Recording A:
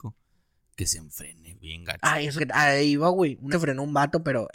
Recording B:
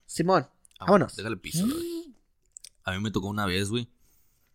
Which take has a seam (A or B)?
A